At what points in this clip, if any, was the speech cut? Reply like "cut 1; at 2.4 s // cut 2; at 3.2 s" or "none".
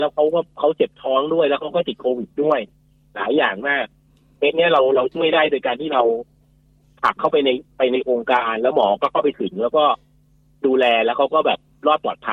none